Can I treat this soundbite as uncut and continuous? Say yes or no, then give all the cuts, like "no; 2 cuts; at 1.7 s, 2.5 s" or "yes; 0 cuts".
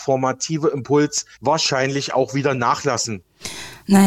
no; 1 cut; at 1.3 s